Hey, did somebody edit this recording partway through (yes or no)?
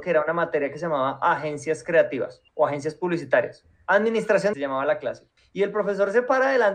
yes